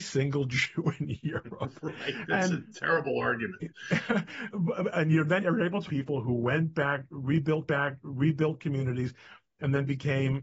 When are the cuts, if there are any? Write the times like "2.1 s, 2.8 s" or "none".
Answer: 4.5 s, 5.4 s, 5.9 s, 7.7 s

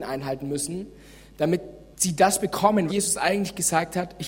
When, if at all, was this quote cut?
1.9 s, 2.9 s

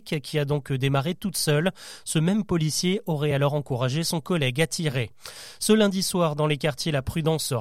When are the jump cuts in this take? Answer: none

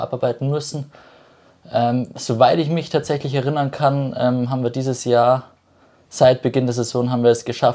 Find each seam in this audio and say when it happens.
none

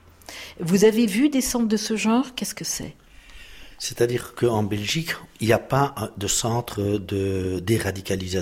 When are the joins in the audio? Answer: none

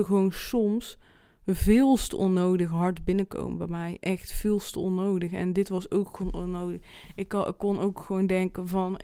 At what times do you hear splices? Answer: none

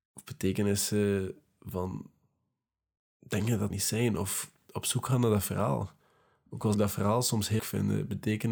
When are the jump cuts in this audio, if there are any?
3.7 s, 6.7 s, 7.6 s

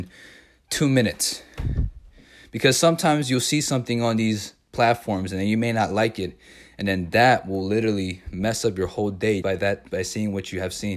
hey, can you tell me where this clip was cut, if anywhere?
9.4 s, 9.9 s

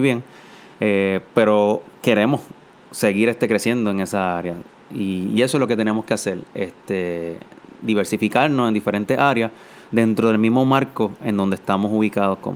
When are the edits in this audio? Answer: none

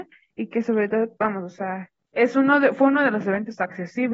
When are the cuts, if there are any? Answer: 1.2 s

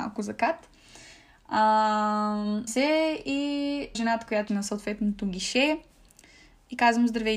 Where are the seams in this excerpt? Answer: 2.7 s, 3.9 s, 4.5 s

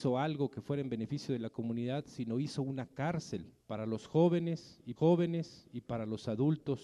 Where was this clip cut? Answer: 3.6 s, 5.0 s

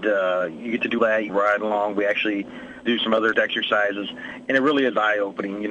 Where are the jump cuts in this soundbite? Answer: 1.0 s, 1.3 s, 2.9 s, 3.3 s

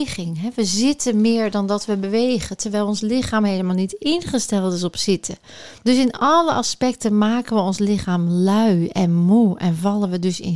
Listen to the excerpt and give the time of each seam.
5.8 s

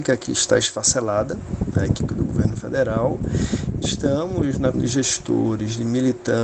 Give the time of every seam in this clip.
2.1 s, 3.8 s, 4.7 s

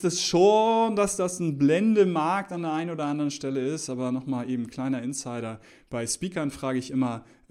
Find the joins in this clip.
none

